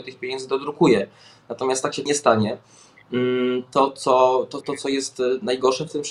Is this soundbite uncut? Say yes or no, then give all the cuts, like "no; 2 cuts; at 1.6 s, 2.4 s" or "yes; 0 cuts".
no; 2 cuts; at 2.1 s, 4.6 s